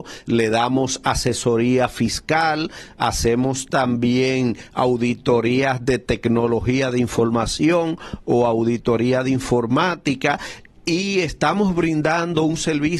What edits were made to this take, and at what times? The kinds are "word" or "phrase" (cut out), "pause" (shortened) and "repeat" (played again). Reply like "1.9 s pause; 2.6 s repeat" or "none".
none